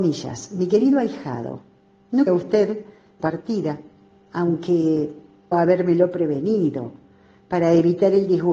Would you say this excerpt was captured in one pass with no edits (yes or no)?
no